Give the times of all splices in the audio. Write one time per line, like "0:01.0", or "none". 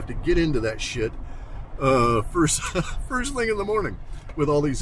none